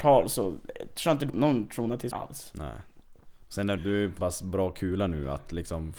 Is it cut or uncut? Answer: cut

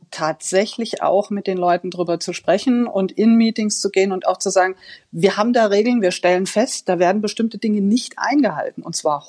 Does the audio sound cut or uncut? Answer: uncut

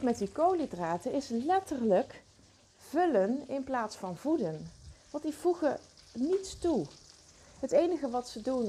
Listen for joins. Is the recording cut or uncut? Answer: uncut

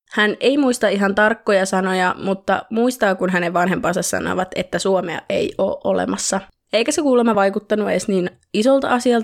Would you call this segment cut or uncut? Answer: uncut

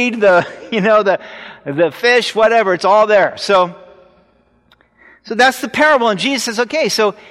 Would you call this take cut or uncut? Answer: uncut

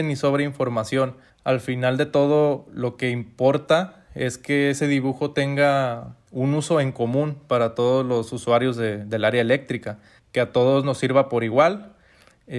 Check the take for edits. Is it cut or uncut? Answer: cut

